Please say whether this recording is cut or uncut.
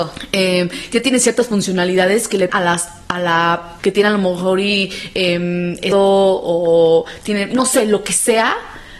cut